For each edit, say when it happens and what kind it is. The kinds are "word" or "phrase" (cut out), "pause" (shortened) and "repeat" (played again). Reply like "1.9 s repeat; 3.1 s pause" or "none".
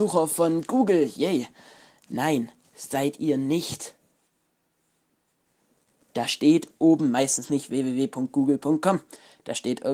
none